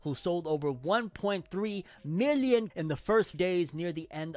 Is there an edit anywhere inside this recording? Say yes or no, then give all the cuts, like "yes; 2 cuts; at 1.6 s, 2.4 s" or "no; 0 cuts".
yes; 2 cuts; at 2.7 s, 3.3 s